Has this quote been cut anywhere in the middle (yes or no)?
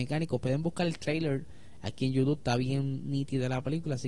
no